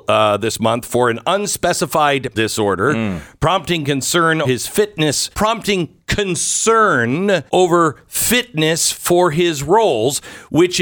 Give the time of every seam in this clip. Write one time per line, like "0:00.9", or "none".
0:02.3
0:04.4
0:05.3
0:07.5